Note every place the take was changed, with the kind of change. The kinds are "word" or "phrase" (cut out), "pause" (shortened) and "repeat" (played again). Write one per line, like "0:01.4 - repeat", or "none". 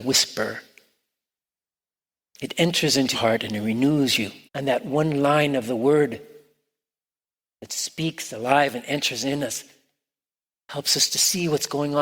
0:03.1 - word
0:04.5 - pause